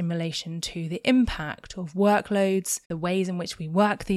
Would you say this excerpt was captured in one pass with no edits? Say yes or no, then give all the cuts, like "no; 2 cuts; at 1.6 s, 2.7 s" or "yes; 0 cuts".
no; 1 cut; at 2.8 s